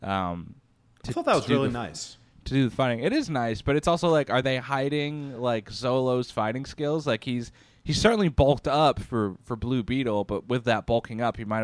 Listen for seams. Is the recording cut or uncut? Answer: uncut